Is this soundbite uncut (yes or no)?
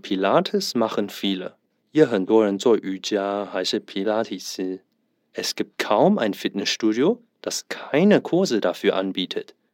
yes